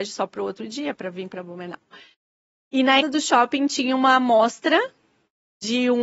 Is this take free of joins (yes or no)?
no